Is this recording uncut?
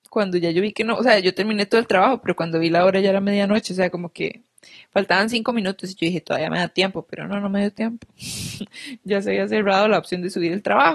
yes; 0 cuts

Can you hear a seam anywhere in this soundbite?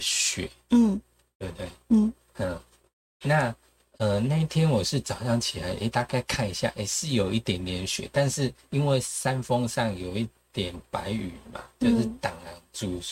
no; 0 cuts

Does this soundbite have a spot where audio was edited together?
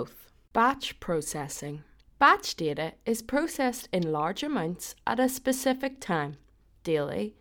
yes; 1 cut; at 2.1 s

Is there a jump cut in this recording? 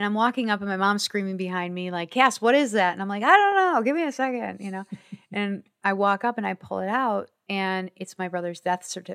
no; 0 cuts

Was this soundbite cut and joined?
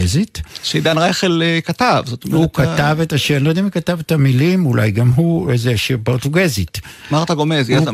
no; 0 cuts

